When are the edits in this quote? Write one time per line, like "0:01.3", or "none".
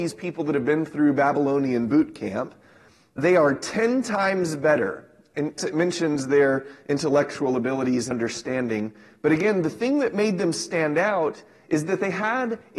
0:03.2
0:05.6
0:08.1